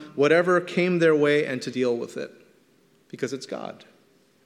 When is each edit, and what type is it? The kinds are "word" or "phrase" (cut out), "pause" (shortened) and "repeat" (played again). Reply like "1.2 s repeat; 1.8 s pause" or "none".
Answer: 1.7 s word